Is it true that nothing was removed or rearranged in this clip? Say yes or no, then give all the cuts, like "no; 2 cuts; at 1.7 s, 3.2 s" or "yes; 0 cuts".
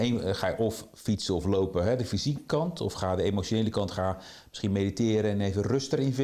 yes; 0 cuts